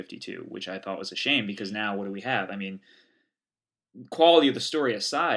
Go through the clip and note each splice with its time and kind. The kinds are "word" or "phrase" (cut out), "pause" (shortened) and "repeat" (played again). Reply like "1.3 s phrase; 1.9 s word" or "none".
none